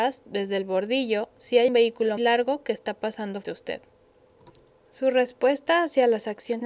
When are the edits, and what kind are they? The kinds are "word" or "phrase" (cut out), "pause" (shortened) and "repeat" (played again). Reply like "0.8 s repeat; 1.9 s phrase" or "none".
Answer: 1.7 s word; 2.2 s word; 3.4 s word